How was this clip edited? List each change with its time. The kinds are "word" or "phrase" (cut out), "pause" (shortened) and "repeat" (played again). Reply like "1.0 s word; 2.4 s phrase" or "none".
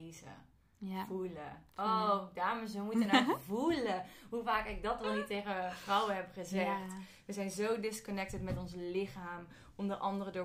none